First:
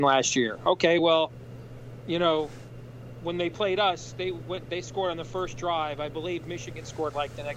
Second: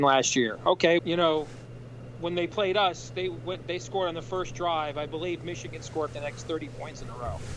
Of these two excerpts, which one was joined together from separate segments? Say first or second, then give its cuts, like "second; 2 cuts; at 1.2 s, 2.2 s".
second; 2 cuts; at 1.0 s, 6.1 s